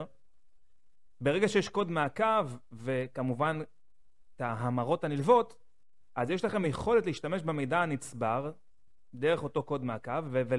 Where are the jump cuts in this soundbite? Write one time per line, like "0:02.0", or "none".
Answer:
none